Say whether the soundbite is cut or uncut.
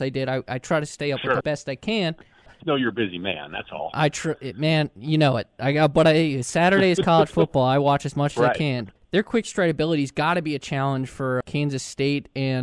cut